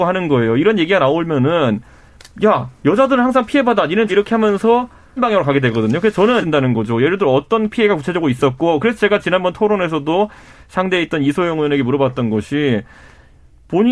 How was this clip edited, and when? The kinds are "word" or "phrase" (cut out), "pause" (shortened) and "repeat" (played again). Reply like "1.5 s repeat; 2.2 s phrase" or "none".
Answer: 4.1 s word; 5.2 s phrase; 6.4 s phrase